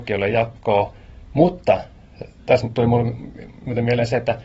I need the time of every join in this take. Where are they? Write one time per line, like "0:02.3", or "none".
none